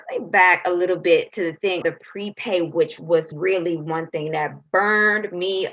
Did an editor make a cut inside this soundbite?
yes; 2 cuts; at 1.8 s, 3.3 s

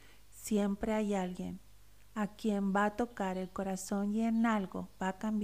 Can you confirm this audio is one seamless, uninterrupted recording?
yes; 0 cuts

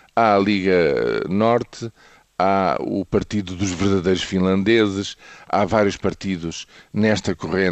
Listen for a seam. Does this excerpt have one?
no; 0 cuts

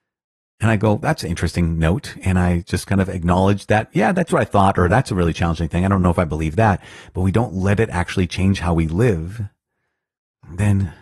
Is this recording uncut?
yes; 0 cuts

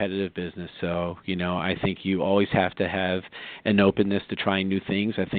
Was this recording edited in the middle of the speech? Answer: no; 0 cuts

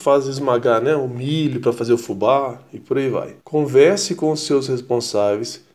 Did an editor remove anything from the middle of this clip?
yes; 1 cut; at 3.4 s

